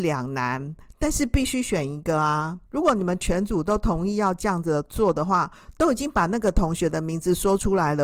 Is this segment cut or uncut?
cut